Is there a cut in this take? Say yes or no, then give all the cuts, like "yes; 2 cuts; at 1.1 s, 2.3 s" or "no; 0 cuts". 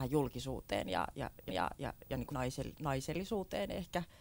yes; 2 cuts; at 1.5 s, 2.3 s